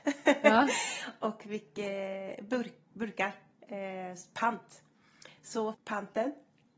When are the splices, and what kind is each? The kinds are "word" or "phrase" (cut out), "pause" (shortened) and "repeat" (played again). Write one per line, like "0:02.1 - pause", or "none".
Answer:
0:05.7 - word